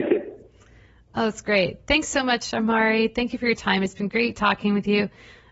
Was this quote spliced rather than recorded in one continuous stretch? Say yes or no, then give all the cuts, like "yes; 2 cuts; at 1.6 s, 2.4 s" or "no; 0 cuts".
no; 0 cuts